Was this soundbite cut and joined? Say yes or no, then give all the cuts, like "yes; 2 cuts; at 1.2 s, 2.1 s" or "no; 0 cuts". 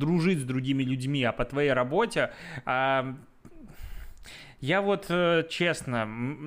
no; 0 cuts